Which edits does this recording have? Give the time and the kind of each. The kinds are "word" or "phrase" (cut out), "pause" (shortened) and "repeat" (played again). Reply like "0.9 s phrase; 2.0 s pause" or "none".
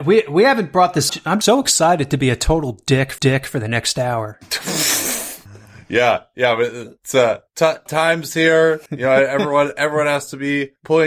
1.1 s phrase; 1.4 s word; 3.2 s repeat; 7.9 s word; 8.9 s pause